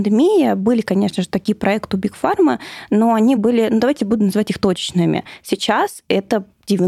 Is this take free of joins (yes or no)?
yes